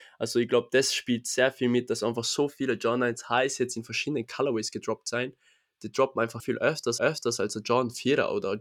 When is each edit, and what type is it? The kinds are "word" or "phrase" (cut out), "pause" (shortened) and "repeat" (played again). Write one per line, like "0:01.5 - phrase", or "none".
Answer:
0:06.4 - word
0:07.0 - repeat